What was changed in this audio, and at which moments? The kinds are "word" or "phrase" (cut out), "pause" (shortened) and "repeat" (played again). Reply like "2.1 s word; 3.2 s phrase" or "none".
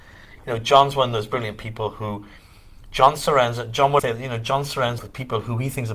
4.0 s word; 5.0 s word